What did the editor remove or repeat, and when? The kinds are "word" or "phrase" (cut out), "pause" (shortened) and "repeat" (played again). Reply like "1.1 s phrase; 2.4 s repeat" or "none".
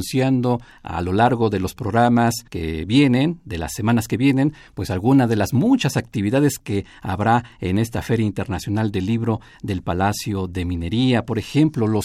2.5 s pause